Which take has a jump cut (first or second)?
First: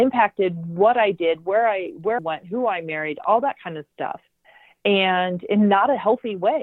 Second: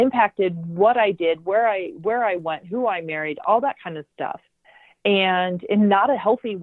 first